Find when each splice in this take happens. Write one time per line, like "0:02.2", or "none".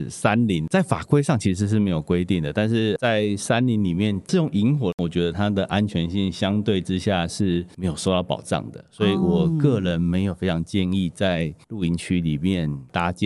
none